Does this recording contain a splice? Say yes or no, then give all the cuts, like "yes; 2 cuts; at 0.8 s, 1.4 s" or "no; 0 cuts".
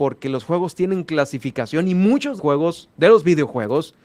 yes; 1 cut; at 2.4 s